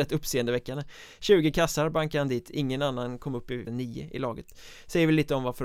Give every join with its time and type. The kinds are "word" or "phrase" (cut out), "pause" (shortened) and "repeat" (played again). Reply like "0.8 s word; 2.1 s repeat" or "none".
3.7 s word